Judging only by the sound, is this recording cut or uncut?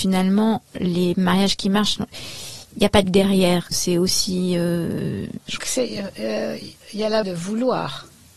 cut